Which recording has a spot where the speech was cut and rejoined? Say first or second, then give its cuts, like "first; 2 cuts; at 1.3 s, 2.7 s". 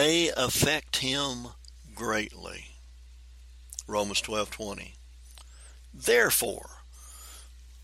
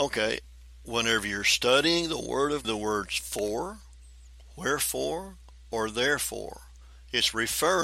second; 1 cut; at 2.6 s